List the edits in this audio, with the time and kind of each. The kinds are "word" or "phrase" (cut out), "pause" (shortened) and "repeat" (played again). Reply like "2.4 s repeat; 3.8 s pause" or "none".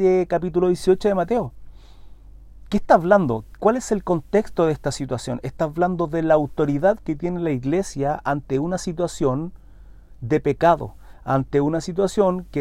none

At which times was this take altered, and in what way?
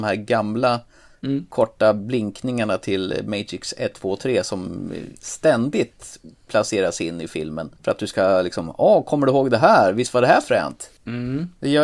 7.8 s pause

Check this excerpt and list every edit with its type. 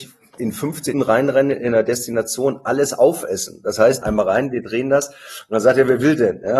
0.9 s word; 4.0 s phrase

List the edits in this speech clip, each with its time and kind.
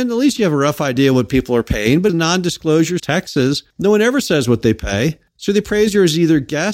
2.1 s phrase; 3.0 s phrase; 3.7 s pause; 5.3 s pause

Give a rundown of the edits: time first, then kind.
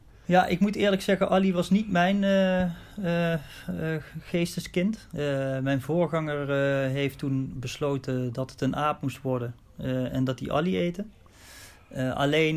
none

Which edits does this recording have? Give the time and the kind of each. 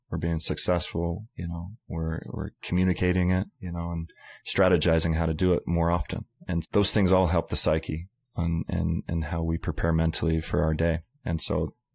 1.3 s pause; 3.5 s pause; 6.6 s word; 8.2 s pause

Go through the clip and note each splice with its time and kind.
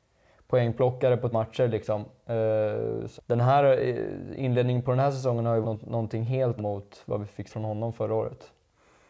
1.3 s word; 3.2 s word; 5.6 s word; 6.6 s word; 7.5 s word

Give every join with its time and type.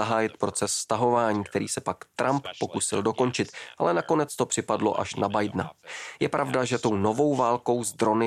none

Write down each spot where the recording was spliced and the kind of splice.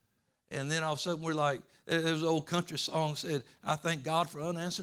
none

